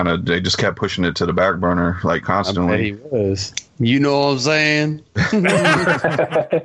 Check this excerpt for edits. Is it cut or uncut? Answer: cut